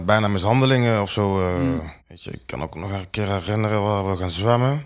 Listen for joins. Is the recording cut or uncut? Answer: cut